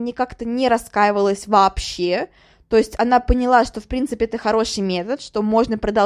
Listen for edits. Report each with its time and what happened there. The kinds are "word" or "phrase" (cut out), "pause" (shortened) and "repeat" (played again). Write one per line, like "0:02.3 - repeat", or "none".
none